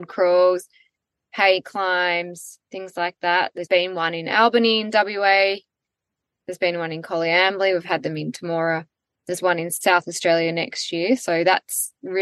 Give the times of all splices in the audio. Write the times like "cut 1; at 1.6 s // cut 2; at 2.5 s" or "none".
cut 1; at 3.7 s